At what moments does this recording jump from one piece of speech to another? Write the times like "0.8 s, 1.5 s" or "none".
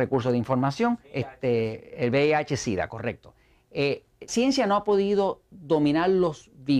1.0 s, 4.3 s